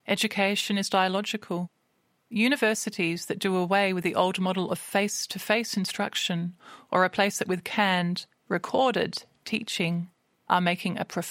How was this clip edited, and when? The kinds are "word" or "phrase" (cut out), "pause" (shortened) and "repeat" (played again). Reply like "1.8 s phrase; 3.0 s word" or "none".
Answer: none